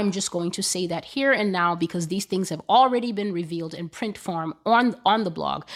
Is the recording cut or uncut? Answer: uncut